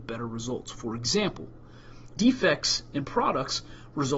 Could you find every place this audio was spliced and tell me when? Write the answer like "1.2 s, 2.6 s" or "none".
2.2 s